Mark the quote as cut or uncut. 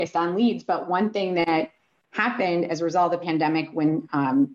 uncut